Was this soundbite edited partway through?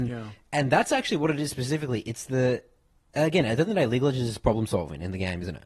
no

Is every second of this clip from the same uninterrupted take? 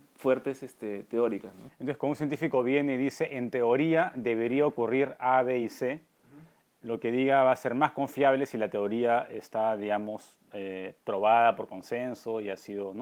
yes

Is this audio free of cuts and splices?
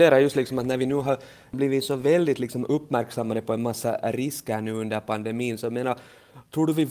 yes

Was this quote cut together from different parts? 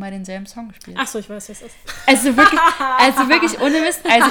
no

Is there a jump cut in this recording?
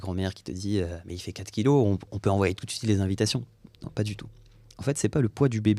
yes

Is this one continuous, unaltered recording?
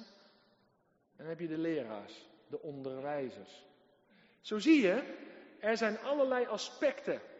yes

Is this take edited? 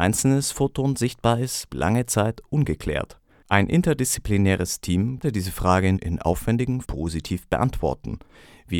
yes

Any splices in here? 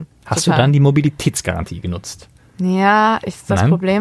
no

